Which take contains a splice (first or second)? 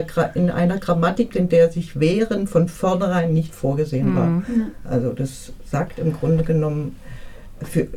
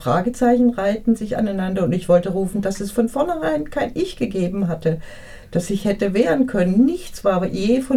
first